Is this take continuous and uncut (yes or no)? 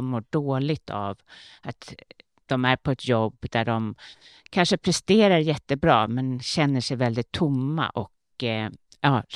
yes